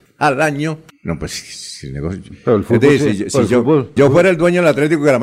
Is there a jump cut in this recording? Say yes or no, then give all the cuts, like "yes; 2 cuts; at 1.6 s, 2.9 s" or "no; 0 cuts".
yes; 1 cut; at 4.0 s